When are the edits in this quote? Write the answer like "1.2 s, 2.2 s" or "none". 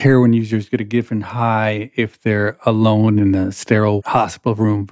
none

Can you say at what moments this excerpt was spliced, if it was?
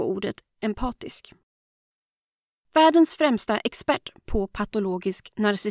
none

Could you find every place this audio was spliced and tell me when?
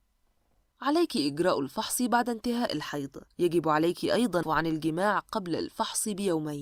3.3 s, 4.4 s

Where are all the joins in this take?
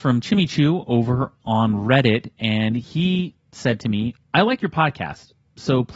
4.2 s

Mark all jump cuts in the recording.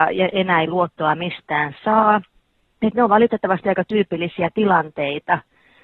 none

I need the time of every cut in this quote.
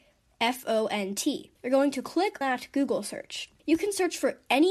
1.5 s, 2.4 s, 3.6 s

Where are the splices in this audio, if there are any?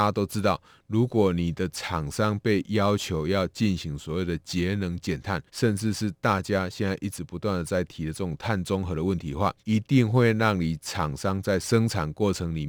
5.5 s, 9.6 s

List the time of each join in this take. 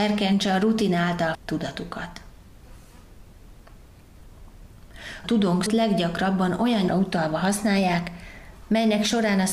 1.3 s, 5.2 s, 5.7 s, 6.9 s

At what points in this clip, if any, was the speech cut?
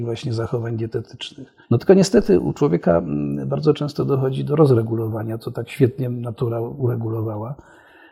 1.6 s, 5.4 s

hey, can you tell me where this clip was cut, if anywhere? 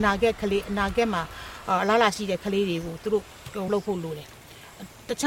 3.7 s

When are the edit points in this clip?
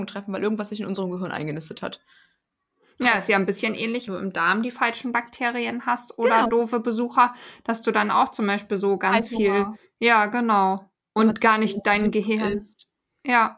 4.1 s, 11.0 s

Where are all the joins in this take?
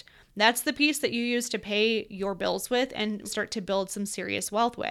3.2 s

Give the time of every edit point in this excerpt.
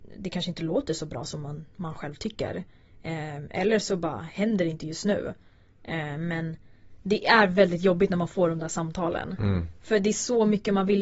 none

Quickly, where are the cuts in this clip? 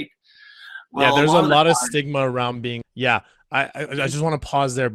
2.8 s

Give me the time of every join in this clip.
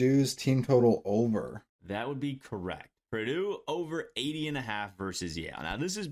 none

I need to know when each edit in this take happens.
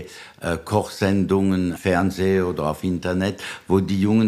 1.8 s

